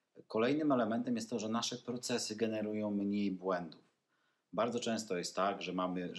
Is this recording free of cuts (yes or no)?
yes